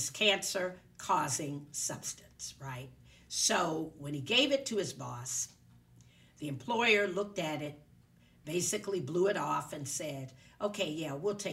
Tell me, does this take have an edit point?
no; 0 cuts

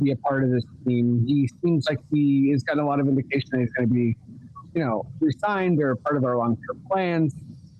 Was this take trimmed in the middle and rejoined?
no; 0 cuts

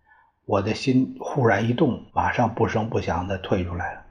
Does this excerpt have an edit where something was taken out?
yes; 1 cut; at 2.1 s

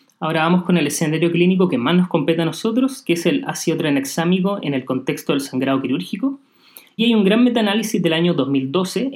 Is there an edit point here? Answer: yes; 1 cut; at 7.0 s

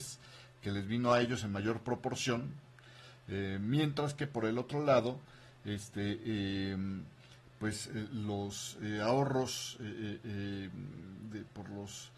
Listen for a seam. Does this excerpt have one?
no; 0 cuts

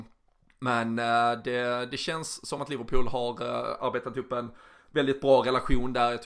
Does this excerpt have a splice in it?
no; 0 cuts

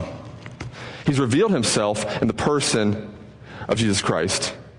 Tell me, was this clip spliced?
no; 0 cuts

